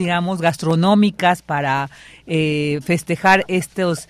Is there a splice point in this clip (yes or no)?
no